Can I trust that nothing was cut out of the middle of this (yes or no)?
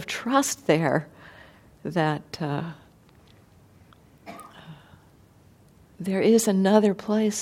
yes